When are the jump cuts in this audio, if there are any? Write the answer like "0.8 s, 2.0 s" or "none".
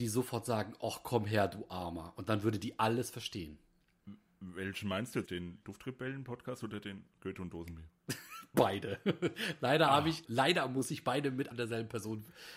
5.3 s, 10.2 s, 11.5 s

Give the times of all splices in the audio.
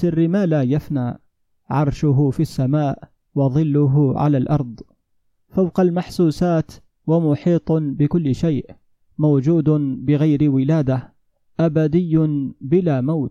none

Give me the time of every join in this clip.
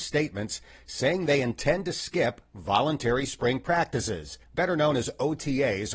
4.4 s

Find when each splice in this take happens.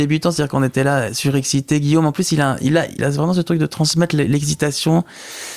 3.0 s

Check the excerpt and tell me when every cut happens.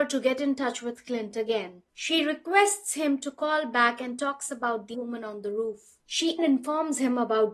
4.9 s, 6.4 s

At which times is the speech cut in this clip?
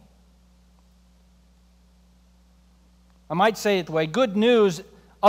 3.9 s

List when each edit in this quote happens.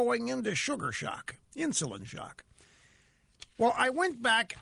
1.4 s, 3.5 s

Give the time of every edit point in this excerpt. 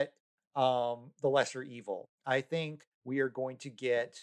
2.2 s, 2.9 s

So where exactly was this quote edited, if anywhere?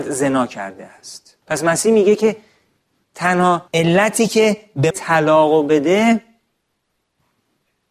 1.4 s, 3.7 s, 4.9 s

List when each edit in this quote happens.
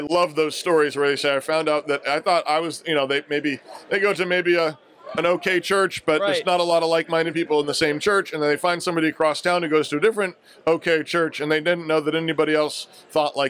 none

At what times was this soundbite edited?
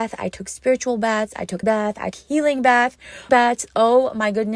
1.6 s, 2.1 s, 3.3 s

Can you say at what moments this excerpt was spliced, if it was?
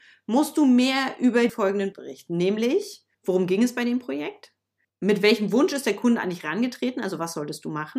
1.5 s, 1.9 s, 3.1 s, 4.9 s

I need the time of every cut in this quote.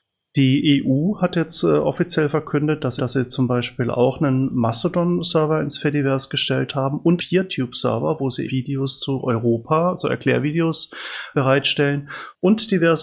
3.0 s, 7.2 s, 8.5 s, 11.3 s

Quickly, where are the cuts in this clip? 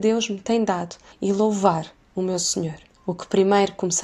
none

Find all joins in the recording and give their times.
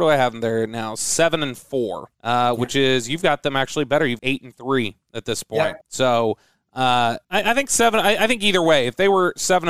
2.1 s, 4.2 s, 5.8 s, 7.2 s

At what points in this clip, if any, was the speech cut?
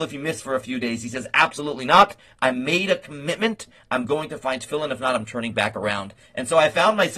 none

